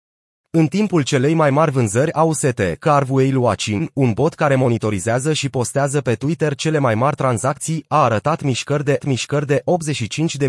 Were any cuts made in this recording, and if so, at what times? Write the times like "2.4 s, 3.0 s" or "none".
9.0 s